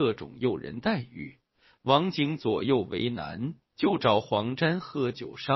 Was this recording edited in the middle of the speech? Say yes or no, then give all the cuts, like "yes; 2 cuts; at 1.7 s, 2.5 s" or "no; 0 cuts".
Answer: no; 0 cuts